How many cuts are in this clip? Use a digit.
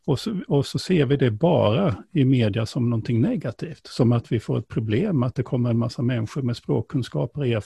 0